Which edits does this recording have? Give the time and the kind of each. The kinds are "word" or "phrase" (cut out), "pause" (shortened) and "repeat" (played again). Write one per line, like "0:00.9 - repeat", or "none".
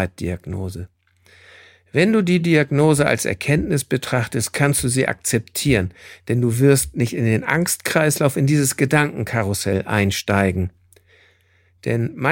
none